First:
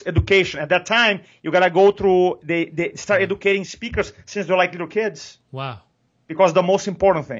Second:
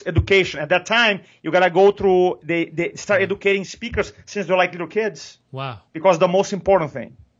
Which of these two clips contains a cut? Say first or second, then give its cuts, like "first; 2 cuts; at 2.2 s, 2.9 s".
second; 1 cut; at 5.9 s